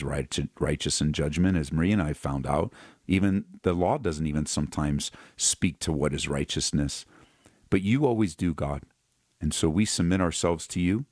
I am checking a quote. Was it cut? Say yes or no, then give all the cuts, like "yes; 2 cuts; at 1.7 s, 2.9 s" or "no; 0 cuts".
no; 0 cuts